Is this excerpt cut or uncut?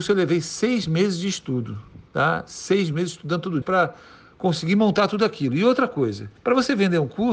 cut